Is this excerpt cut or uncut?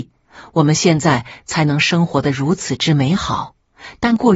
uncut